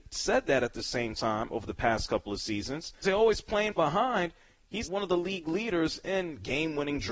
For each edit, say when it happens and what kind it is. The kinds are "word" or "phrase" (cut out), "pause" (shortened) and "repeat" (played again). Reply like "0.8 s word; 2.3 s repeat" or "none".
3.0 s word; 3.8 s word; 4.8 s word